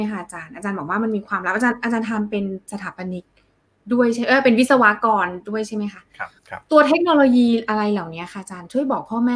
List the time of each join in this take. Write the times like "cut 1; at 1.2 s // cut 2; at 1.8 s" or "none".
cut 1; at 6.4 s